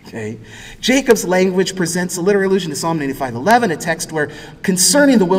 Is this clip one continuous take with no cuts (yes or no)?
yes